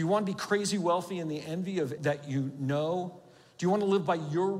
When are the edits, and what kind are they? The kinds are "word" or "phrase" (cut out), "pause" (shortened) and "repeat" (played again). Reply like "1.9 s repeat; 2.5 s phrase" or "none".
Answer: 2.0 s word